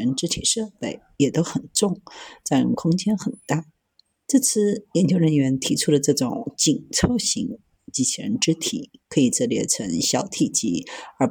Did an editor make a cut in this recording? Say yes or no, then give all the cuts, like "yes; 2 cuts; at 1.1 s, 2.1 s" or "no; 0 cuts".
no; 0 cuts